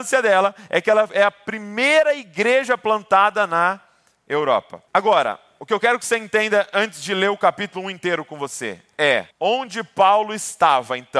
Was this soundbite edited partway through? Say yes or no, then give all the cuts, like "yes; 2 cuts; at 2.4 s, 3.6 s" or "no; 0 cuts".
yes; 2 cuts; at 4.9 s, 9.3 s